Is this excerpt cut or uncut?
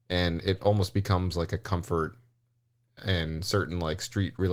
uncut